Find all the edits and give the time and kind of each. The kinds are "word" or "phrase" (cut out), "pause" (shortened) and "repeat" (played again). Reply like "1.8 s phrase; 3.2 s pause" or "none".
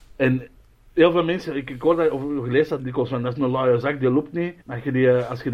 2.8 s word; 4.6 s pause